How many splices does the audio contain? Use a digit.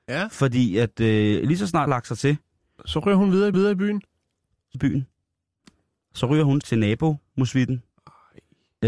4